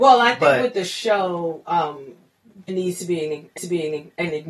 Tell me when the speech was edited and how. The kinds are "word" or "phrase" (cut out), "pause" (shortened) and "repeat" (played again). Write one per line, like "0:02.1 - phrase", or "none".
0:02.7 - word
0:03.6 - repeat